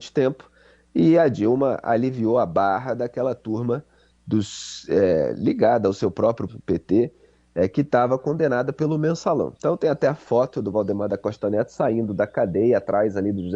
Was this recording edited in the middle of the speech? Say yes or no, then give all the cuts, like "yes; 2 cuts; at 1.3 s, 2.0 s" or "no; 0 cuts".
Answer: yes; 2 cuts; at 6.5 s, 9.6 s